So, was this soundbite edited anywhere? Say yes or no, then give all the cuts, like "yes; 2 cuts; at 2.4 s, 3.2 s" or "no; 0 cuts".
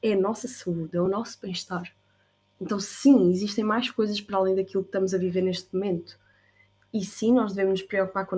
no; 0 cuts